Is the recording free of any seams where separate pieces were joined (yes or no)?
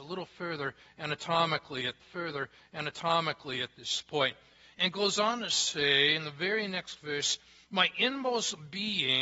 no